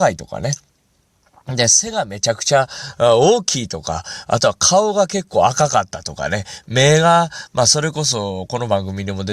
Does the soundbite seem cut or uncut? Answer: uncut